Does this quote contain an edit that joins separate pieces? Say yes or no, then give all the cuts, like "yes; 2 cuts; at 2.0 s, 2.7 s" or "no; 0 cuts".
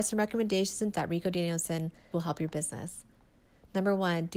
yes; 2 cuts; at 0.9 s, 2.1 s